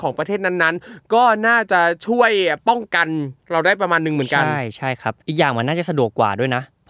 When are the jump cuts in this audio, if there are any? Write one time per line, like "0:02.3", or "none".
0:03.4
0:05.2